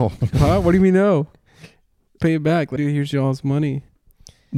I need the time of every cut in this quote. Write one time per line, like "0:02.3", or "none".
0:02.2
0:02.8